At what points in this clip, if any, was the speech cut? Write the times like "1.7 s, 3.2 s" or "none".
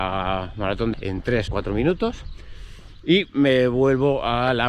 0.9 s, 1.5 s